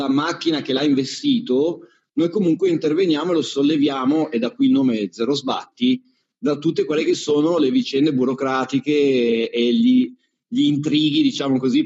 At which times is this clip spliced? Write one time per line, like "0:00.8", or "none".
none